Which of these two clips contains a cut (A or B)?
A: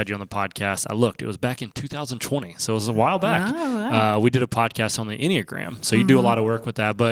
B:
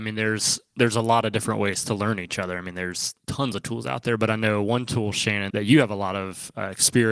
B